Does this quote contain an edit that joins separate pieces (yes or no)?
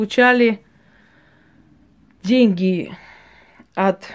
no